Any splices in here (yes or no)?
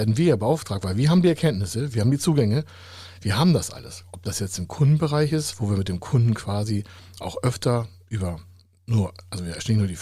no